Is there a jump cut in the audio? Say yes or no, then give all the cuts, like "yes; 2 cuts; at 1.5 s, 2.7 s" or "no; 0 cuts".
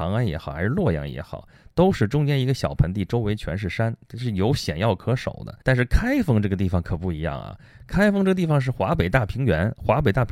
yes; 1 cut; at 5.6 s